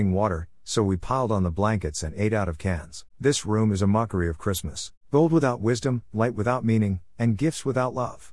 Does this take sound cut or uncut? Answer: cut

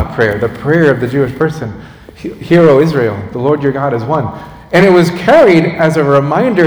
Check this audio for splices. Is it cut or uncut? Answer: uncut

